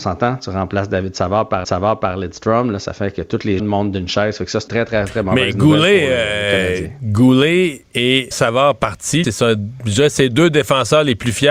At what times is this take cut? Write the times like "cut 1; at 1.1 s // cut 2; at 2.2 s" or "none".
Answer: cut 1; at 1.6 s // cut 2; at 3.6 s // cut 3; at 4.7 s // cut 4; at 8.3 s // cut 5; at 9.2 s